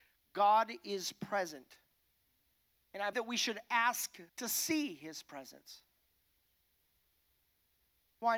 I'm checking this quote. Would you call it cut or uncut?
cut